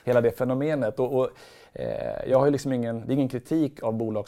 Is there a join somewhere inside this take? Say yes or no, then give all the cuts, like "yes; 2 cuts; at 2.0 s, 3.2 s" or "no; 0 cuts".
no; 0 cuts